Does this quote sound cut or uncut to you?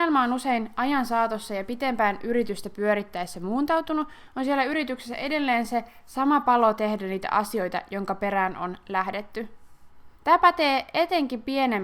cut